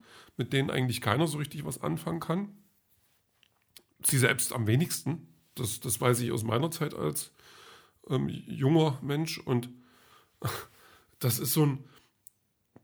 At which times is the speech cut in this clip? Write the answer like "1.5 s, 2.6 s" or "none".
none